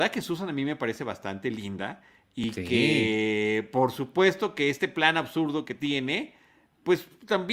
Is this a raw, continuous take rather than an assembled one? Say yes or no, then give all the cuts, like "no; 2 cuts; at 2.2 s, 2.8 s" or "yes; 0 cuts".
yes; 0 cuts